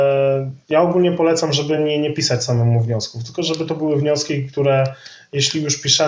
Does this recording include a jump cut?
no; 0 cuts

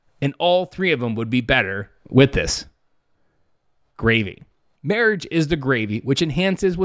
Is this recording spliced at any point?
no; 0 cuts

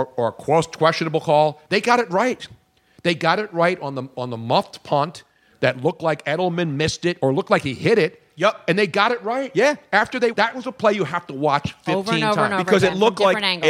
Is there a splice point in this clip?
yes; 2 cuts; at 1.6 s, 10.3 s

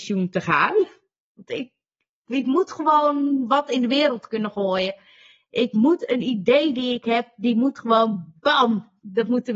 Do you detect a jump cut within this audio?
no; 0 cuts

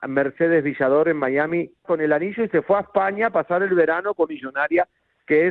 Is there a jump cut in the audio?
yes; 2 cuts; at 1.8 s, 4.3 s

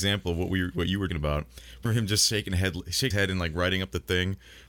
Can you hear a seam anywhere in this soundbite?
yes; 3 cuts; at 1.1 s, 1.9 s, 3.1 s

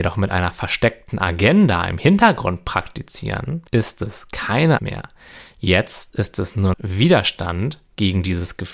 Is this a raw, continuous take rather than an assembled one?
no; 3 cuts; at 3.7 s, 4.8 s, 6.7 s

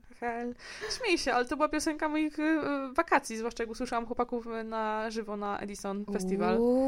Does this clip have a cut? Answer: no; 0 cuts

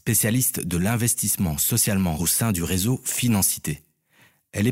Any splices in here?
yes; 1 cut; at 2.2 s

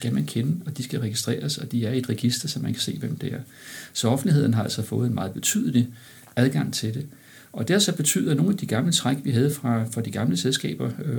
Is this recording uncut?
yes; 0 cuts

